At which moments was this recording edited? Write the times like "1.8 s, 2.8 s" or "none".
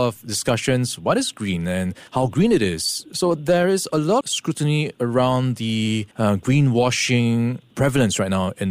2.1 s, 4.2 s, 6.1 s